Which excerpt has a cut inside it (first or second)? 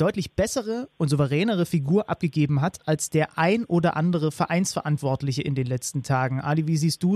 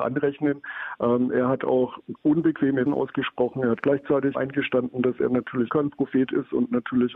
second